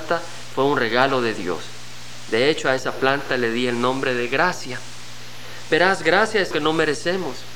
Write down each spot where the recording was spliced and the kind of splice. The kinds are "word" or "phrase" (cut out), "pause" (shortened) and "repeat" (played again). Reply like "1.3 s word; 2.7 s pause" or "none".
6.5 s word